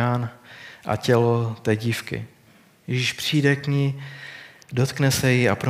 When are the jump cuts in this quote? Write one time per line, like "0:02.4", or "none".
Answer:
none